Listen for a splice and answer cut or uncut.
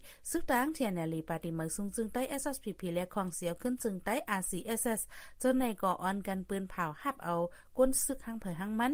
uncut